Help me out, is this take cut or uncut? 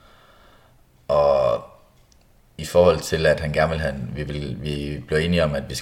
uncut